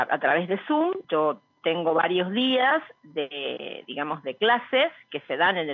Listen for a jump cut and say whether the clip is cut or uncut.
cut